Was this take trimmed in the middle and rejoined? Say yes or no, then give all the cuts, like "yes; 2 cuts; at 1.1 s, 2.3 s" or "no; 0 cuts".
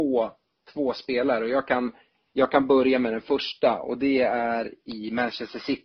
no; 0 cuts